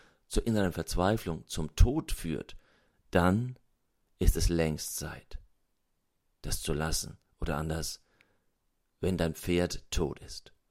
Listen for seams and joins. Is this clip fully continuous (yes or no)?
yes